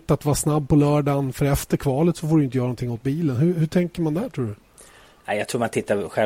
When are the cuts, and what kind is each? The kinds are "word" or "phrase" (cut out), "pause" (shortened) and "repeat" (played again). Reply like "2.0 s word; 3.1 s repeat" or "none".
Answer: none